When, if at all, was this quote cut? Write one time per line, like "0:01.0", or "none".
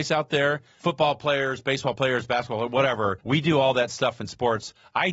0:03.2